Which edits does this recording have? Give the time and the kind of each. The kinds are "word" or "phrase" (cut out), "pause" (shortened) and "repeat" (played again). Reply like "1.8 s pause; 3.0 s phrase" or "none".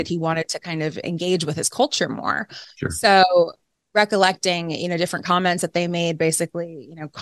1.0 s word